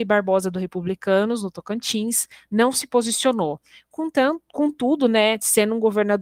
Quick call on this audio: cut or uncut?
uncut